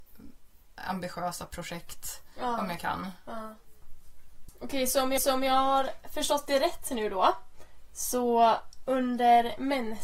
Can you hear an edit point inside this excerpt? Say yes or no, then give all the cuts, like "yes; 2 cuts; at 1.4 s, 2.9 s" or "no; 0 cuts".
yes; 1 cut; at 5.2 s